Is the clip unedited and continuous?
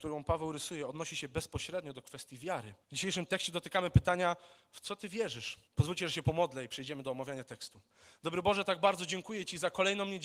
no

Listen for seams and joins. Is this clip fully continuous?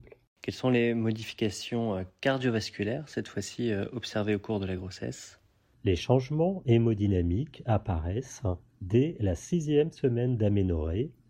yes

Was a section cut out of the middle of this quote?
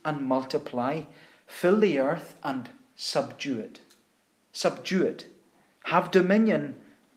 no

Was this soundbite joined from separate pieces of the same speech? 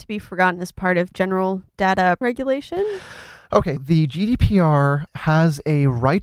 yes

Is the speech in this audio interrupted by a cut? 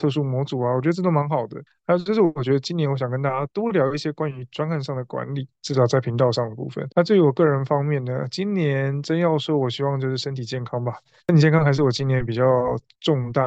yes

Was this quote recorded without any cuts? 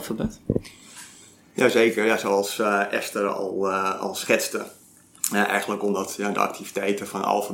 yes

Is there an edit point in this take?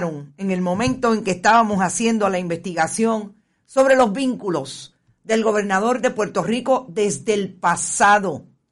no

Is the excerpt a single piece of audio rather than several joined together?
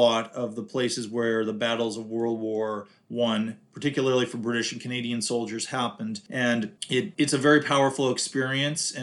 yes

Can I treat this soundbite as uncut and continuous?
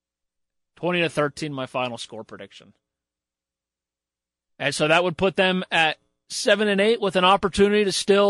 yes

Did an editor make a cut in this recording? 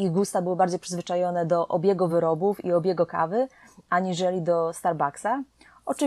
no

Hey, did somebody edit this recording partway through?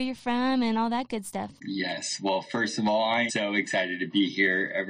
yes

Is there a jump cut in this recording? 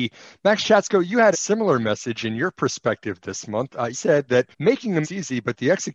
yes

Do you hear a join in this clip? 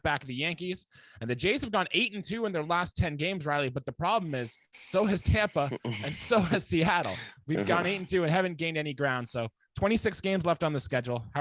no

